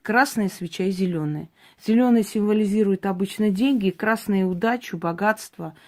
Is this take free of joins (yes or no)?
yes